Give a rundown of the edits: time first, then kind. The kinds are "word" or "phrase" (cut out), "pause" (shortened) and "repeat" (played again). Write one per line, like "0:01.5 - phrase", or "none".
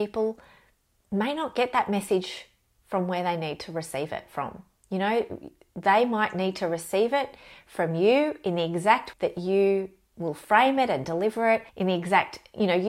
0:09.1 - word
0:11.7 - pause